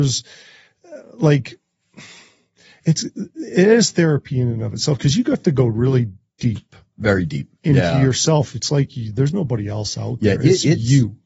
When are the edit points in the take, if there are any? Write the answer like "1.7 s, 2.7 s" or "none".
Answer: 7.6 s